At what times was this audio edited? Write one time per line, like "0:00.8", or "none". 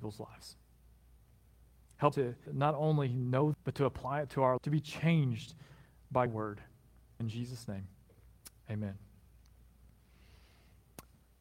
0:02.1
0:02.5
0:03.5
0:04.6
0:06.3
0:07.2